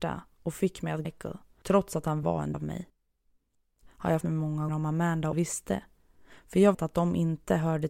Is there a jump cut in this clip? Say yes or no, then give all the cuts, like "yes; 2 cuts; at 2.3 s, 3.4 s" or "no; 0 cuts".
yes; 8 cuts; at 1.0 s, 2.2 s, 2.5 s, 3.8 s, 4.2 s, 4.7 s, 5.3 s, 6.7 s